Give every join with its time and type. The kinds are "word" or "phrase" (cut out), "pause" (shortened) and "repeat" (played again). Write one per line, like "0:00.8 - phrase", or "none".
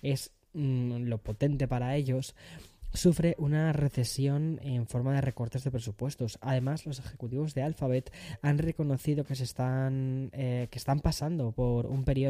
none